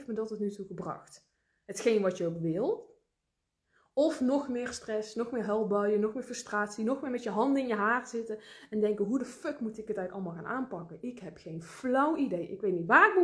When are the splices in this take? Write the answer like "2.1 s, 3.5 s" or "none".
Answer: none